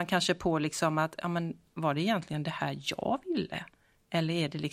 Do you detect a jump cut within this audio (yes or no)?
no